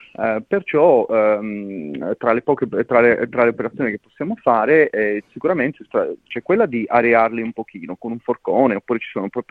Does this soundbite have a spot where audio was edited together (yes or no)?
no